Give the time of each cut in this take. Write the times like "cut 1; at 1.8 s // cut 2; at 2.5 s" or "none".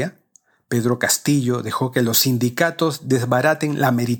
none